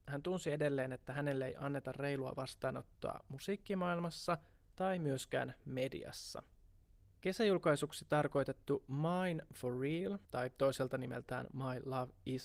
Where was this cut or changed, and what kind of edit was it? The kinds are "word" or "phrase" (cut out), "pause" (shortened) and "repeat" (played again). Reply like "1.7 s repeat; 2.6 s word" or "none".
10.2 s pause